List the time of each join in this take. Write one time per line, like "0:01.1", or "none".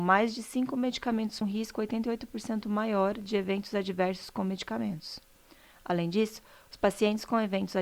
0:01.4